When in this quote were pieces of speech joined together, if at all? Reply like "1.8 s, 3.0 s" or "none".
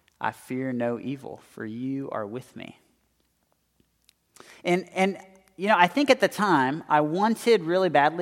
none